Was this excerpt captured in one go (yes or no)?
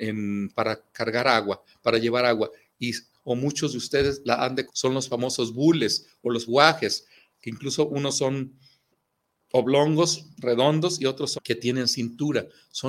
no